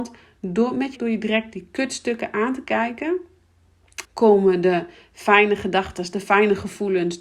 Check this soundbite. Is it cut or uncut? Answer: cut